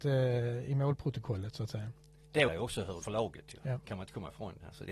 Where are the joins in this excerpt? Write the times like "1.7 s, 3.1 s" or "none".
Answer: 2.5 s, 3.0 s

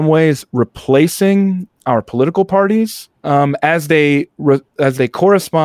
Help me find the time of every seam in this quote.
3.2 s

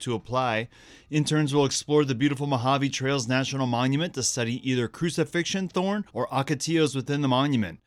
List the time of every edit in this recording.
6.1 s

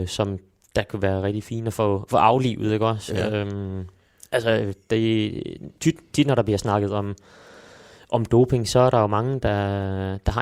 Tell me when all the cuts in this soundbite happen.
none

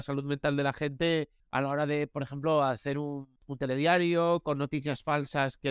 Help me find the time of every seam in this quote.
1.4 s, 3.4 s

